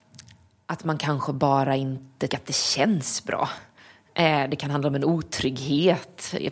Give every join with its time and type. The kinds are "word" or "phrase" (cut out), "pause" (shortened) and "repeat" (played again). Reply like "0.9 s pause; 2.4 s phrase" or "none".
2.3 s word